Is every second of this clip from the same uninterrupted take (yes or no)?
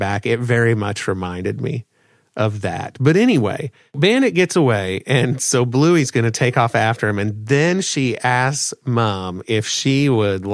yes